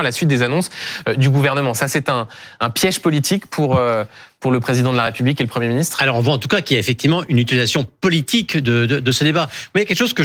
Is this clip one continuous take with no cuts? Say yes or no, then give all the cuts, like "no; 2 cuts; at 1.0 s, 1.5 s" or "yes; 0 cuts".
yes; 0 cuts